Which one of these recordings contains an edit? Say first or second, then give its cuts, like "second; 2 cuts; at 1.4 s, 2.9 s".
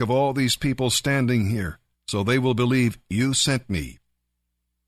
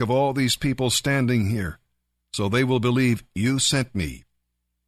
first; 1 cut; at 1.9 s